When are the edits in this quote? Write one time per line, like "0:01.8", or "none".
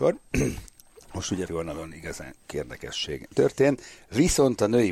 0:01.5
0:02.5
0:03.3